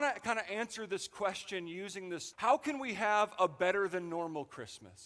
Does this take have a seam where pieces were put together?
yes; 1 cut; at 2.3 s

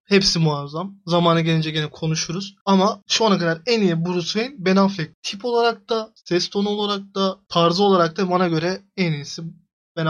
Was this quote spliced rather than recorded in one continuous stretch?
no; 0 cuts

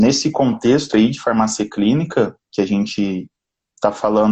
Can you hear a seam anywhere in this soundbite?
yes; 1 cut; at 2.4 s

